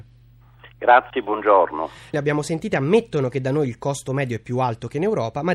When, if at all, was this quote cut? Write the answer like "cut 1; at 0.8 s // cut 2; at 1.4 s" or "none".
cut 1; at 2.1 s